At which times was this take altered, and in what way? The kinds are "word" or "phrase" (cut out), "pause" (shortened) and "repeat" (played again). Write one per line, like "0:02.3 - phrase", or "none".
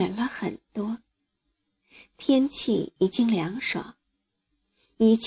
none